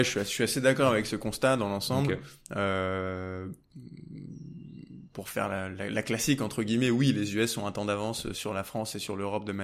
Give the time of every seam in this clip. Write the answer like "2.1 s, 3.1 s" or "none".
8.3 s